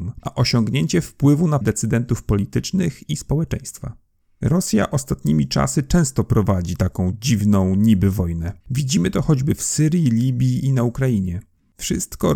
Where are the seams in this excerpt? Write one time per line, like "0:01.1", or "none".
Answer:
0:01.6
0:08.6

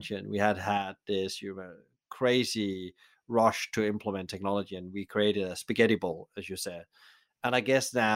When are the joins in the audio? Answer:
none

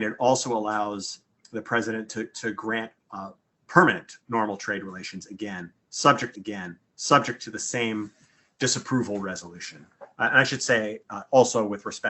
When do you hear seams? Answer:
0:03.0
0:06.3

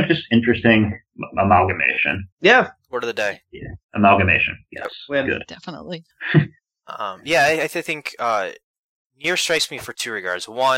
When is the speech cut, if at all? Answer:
0:02.3
0:03.8
0:06.1

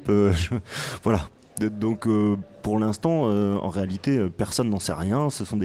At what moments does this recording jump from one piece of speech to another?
none

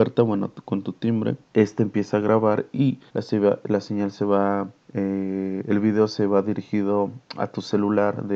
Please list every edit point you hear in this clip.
0:01.4
0:03.1
0:04.8

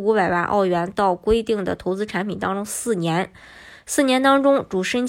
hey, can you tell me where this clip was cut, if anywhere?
none

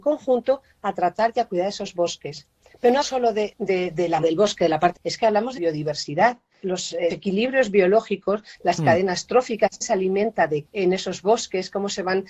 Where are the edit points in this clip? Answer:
0:03.0
0:03.5
0:04.2
0:05.0
0:05.6
0:06.6
0:07.1
0:09.8
0:10.6

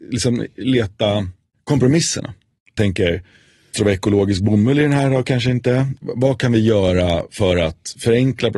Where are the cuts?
0:02.8
0:03.7

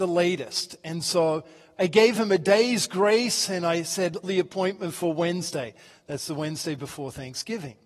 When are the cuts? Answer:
0:04.2

